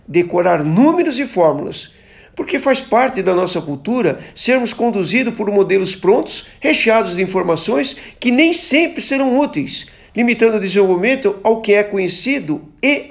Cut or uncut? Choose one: uncut